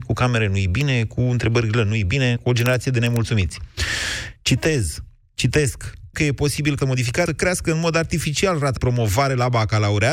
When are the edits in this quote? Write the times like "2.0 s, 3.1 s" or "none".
2.4 s, 6.1 s, 6.8 s, 7.3 s, 8.8 s